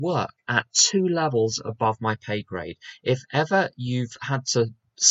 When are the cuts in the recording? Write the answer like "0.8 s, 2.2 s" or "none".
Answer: none